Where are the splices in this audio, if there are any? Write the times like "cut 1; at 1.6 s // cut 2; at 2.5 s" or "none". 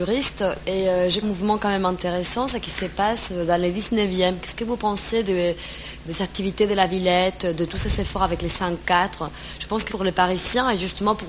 cut 1; at 1.2 s // cut 2; at 6.1 s // cut 3; at 9.9 s